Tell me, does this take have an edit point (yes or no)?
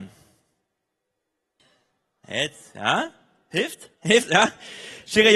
yes